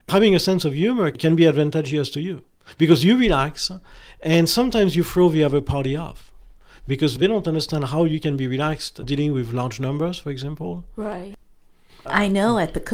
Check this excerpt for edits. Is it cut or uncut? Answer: uncut